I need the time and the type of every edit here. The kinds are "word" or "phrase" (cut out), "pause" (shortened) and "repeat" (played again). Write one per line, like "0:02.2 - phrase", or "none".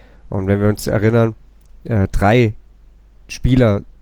none

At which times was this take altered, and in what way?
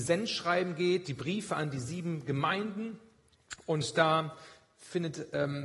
none

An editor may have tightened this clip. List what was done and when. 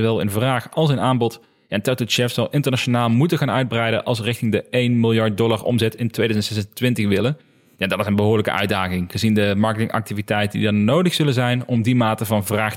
none

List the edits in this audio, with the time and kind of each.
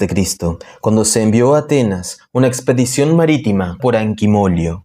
0:03.8 - word

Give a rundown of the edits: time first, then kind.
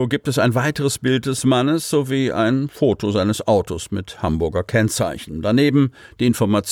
none

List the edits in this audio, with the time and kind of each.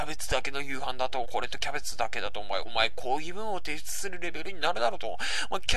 0:01.2 - phrase
0:02.6 - phrase

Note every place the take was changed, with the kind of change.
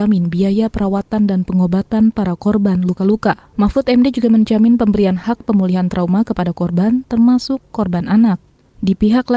0:03.5 - pause

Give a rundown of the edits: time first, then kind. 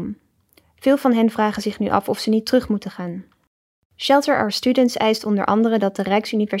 none

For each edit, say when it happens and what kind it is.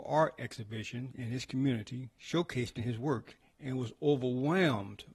none

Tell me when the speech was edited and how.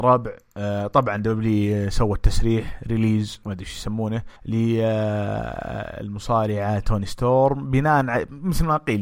0:03.4 - word
0:04.4 - pause

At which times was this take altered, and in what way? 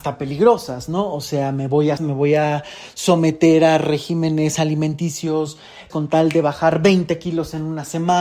0:02.0 - phrase
0:05.9 - word

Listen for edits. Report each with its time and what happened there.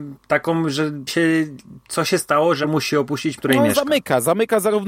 0:01.1 - word
0:02.6 - word
0:03.4 - phrase

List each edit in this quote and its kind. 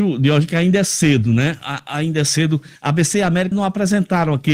0:02.8 - pause
0:03.5 - word

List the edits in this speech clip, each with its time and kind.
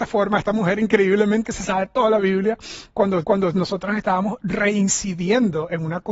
0:01.4 - word
0:03.2 - repeat

